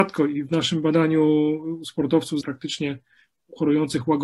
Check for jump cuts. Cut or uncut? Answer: cut